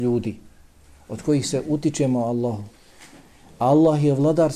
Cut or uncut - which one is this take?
uncut